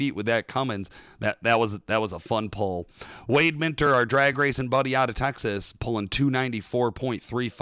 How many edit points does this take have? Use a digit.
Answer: 0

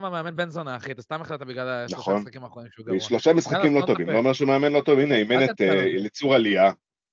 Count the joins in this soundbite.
0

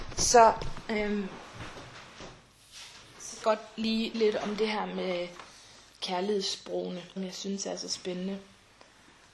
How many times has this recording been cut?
3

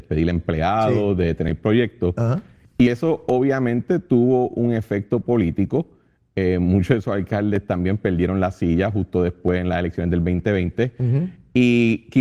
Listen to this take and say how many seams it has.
0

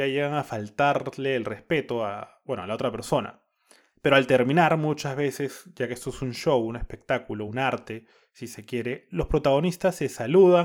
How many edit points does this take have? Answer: 0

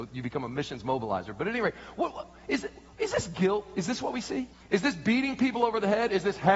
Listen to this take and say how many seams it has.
1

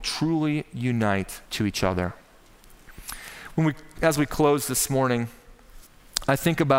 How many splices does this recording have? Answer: 1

